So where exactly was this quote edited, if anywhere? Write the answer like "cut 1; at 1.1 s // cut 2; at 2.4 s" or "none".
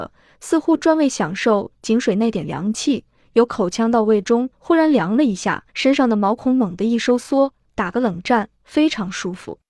cut 1; at 4.5 s // cut 2; at 5.7 s